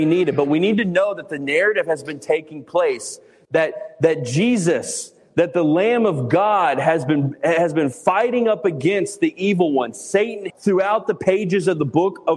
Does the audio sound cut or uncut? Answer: cut